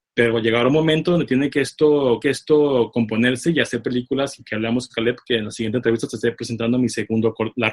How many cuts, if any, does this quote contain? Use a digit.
1